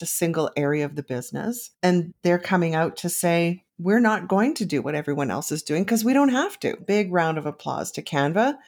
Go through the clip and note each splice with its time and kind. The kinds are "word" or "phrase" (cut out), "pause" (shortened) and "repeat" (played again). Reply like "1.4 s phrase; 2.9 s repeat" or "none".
none